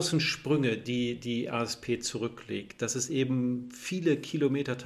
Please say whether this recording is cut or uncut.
uncut